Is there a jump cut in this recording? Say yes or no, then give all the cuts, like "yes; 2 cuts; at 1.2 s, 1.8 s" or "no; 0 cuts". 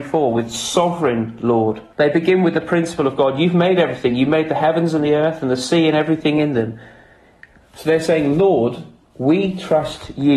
yes; 1 cut; at 1.9 s